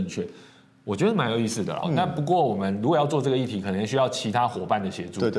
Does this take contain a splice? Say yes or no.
yes